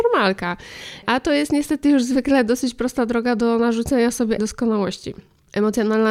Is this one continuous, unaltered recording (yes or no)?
no